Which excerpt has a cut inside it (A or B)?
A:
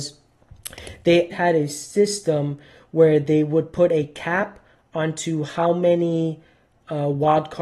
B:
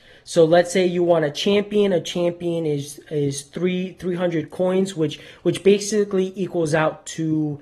A